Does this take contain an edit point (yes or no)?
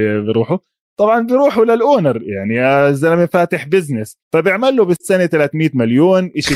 yes